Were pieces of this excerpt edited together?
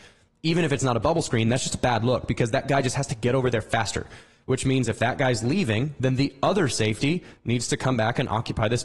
no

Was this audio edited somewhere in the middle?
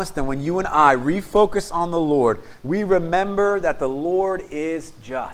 no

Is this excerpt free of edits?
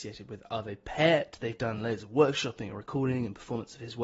yes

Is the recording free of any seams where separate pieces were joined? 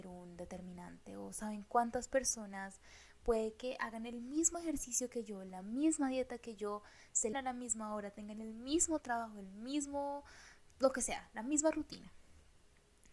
no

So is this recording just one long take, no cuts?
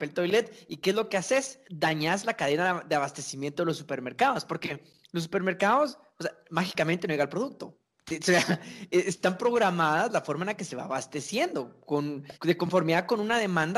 no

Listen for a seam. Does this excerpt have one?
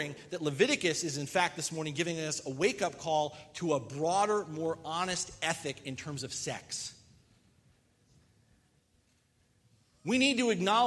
no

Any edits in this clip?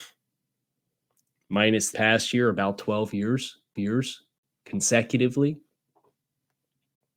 yes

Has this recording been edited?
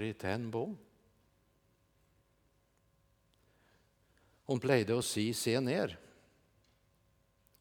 no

